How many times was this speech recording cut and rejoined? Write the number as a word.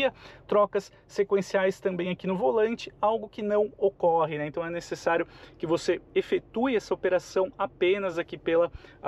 zero